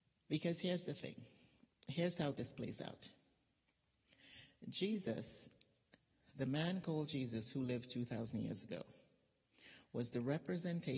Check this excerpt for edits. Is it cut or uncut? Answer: uncut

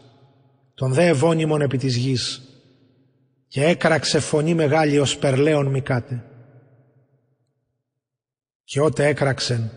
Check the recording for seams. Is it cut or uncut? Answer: uncut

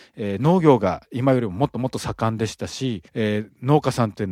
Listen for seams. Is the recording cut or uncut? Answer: cut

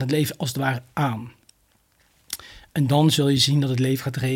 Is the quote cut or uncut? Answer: uncut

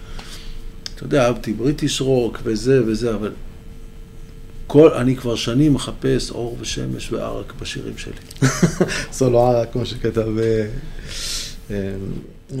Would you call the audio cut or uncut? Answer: uncut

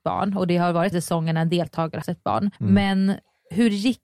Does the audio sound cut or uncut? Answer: cut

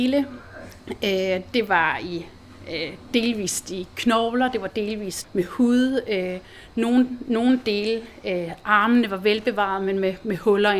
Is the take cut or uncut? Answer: cut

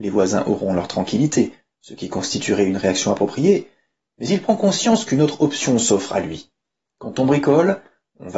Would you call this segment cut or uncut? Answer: uncut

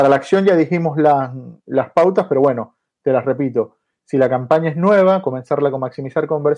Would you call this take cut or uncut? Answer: cut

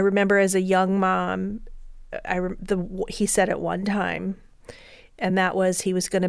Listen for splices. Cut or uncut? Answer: uncut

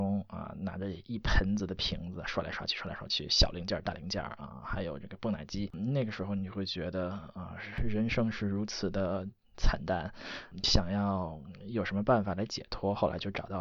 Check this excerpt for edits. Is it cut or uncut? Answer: uncut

